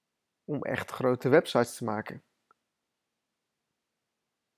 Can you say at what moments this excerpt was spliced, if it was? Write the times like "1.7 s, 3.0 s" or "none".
none

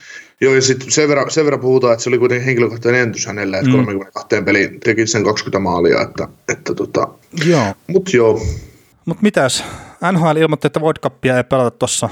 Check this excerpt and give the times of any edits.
4.8 s

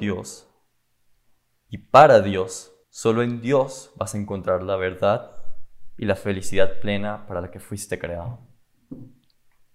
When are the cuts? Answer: 2.8 s

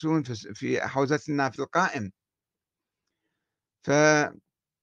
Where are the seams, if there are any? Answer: 1.6 s

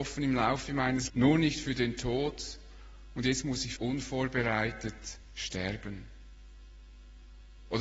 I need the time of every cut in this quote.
1.1 s, 3.8 s

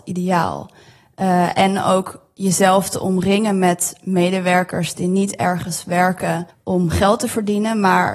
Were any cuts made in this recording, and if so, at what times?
6.5 s

